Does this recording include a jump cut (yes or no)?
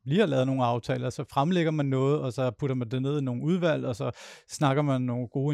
no